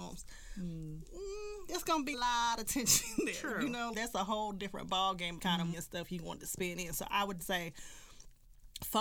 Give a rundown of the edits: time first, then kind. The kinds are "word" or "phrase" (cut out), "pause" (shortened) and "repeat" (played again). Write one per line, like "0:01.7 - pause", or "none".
0:02.1 - word
0:03.9 - word
0:05.4 - phrase
0:05.7 - word
0:07.4 - word